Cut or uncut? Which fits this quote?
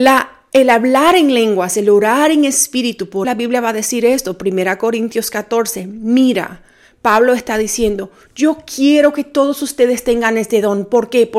cut